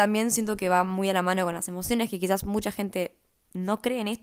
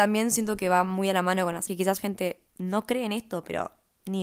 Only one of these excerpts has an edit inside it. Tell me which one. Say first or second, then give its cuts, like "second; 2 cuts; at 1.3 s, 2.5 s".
second; 3 cuts; at 1.7 s, 2.0 s, 2.5 s